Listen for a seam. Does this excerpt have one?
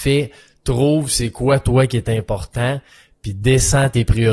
no; 0 cuts

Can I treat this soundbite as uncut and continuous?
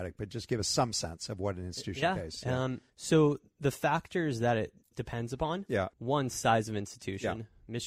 no; 3 cuts; at 2.9 s, 4.8 s, 5.9 s

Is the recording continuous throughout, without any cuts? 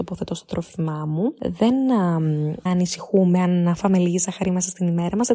no; 1 cut; at 2.7 s

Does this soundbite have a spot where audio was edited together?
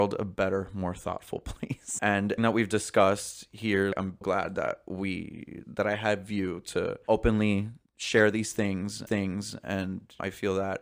yes; 4 cuts; at 2.4 s, 4.2 s, 7.9 s, 9.1 s

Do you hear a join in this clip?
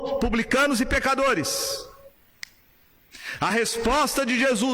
no; 0 cuts

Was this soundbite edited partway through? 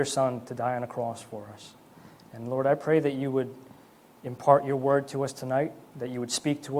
no; 0 cuts

